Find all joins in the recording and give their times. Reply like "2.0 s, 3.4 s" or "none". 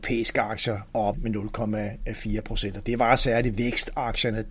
1.1 s